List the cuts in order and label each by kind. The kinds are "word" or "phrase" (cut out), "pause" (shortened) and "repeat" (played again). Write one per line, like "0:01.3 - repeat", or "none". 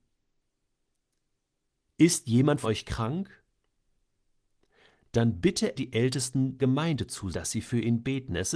0:02.6 - word
0:05.8 - word
0:06.6 - word
0:07.3 - word